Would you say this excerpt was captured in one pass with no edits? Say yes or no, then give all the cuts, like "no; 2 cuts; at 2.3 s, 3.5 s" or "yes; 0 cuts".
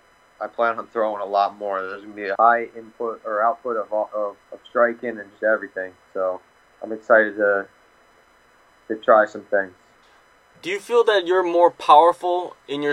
no; 2 cuts; at 2.4 s, 4.4 s